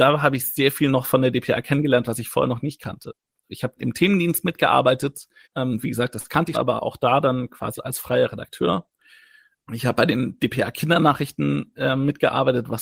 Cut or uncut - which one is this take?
cut